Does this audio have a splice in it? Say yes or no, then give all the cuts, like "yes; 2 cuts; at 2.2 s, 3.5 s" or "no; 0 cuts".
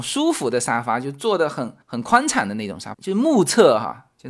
yes; 2 cuts; at 1.8 s, 2.9 s